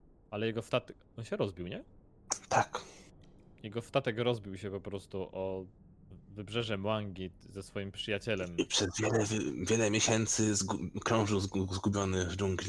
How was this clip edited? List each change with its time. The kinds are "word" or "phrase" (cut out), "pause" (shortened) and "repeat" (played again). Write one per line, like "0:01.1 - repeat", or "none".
none